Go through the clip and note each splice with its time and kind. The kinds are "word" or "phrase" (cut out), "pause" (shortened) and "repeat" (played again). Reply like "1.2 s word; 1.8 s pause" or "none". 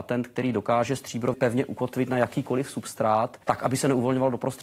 1.3 s word; 3.4 s pause